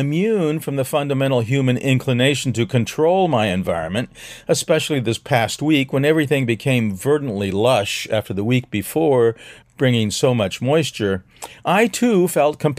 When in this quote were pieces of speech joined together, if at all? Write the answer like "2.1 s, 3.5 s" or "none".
9.6 s